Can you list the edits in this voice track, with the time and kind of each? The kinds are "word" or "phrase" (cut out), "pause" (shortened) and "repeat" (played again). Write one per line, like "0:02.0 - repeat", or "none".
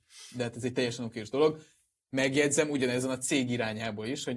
none